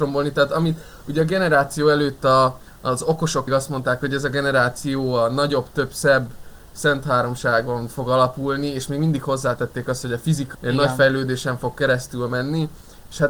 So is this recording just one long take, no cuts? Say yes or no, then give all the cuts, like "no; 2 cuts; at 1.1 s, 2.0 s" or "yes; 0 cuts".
no; 2 cuts; at 3.5 s, 10.5 s